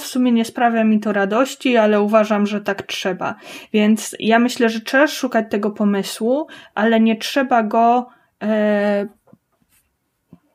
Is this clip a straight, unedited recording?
yes; 0 cuts

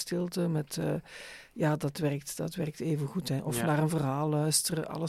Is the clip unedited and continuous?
yes; 0 cuts

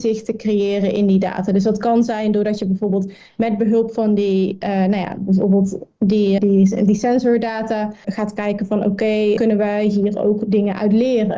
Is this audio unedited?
no; 3 cuts; at 6.4 s, 8.0 s, 9.4 s

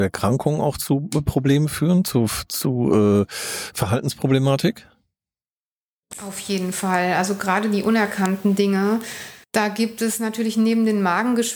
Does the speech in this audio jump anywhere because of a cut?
yes; 1 cut; at 9.4 s

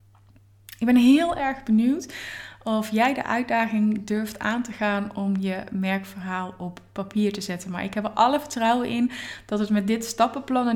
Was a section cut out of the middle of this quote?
no; 0 cuts

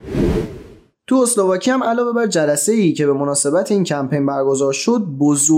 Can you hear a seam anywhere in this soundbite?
no; 0 cuts

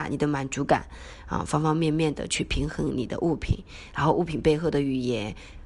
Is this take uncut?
yes; 0 cuts

